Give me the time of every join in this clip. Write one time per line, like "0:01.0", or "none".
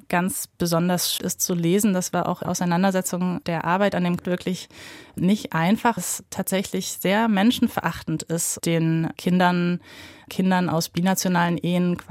0:01.2
0:02.4
0:03.4
0:04.2
0:05.2
0:06.0
0:08.6
0:10.3